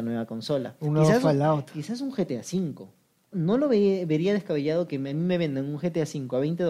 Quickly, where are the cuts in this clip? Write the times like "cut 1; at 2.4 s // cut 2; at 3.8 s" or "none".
cut 1; at 3.3 s